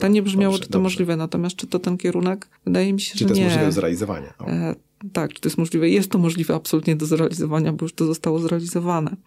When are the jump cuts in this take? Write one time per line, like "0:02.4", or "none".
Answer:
0:02.6